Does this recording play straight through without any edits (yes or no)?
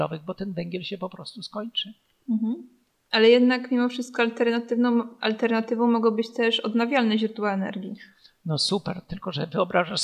yes